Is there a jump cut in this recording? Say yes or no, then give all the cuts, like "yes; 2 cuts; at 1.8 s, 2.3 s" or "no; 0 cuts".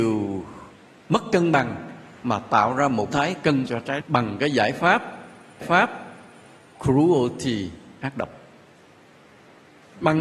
yes; 4 cuts; at 3.1 s, 3.7 s, 4.0 s, 5.6 s